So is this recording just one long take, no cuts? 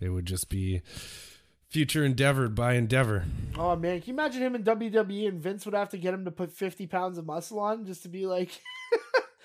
yes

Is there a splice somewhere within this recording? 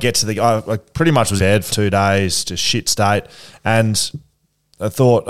yes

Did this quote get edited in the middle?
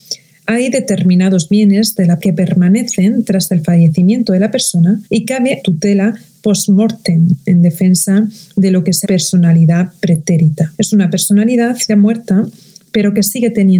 yes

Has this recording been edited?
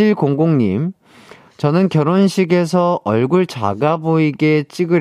no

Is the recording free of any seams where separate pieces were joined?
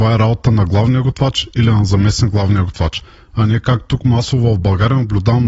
yes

